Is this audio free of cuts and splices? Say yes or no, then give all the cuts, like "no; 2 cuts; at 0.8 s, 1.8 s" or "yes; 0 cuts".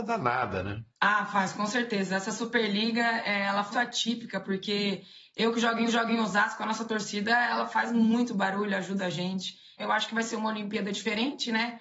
no; 4 cuts; at 0.9 s, 3.7 s, 5.9 s, 9.0 s